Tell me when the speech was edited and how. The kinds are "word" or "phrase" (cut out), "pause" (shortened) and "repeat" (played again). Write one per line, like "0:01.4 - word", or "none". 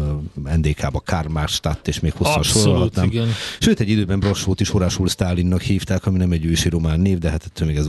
none